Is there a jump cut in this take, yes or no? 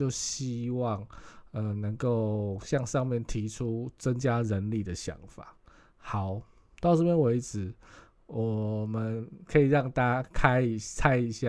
no